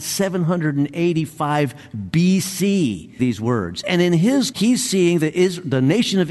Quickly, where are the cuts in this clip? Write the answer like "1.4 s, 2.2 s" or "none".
3.2 s, 4.5 s